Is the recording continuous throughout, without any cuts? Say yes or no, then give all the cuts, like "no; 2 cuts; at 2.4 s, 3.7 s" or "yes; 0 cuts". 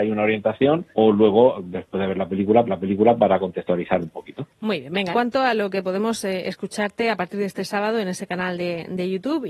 no; 3 cuts; at 0.9 s, 2.7 s, 5.1 s